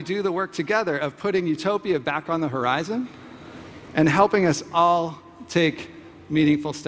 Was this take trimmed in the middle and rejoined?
no; 0 cuts

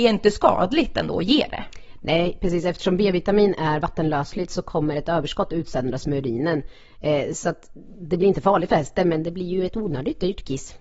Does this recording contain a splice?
no; 0 cuts

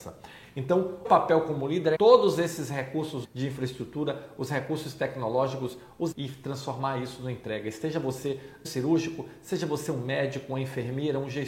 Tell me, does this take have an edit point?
yes; 5 cuts; at 1.0 s, 1.9 s, 3.2 s, 6.1 s, 8.6 s

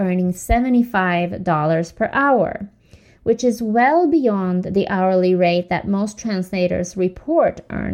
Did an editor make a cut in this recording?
no; 0 cuts

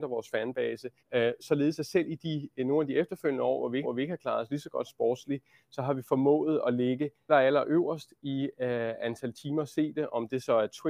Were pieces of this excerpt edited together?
yes; 3 cuts; at 1.0 s, 3.8 s, 7.3 s

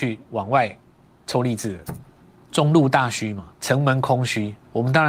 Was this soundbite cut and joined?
yes; 2 cuts; at 2.2 s, 3.5 s

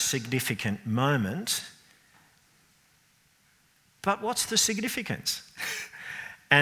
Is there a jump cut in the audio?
no; 0 cuts

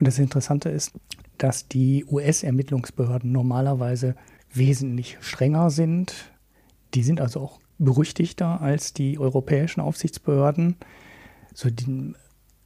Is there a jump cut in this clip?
no; 0 cuts

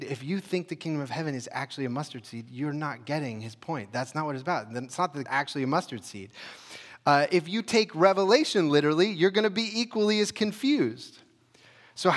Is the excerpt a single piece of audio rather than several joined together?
no; 1 cut; at 5.3 s

